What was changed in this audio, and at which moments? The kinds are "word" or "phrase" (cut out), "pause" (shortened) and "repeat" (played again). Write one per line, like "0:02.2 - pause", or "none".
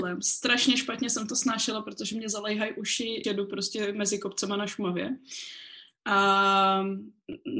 0:03.2 - word